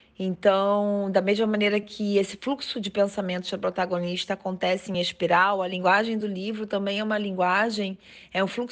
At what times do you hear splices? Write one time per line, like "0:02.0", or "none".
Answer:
none